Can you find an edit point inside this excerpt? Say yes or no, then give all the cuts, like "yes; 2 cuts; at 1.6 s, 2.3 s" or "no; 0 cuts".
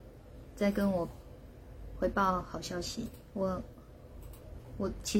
no; 0 cuts